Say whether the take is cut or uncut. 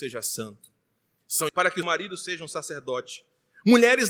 cut